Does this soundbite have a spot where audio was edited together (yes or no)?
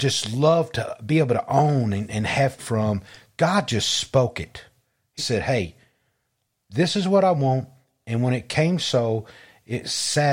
yes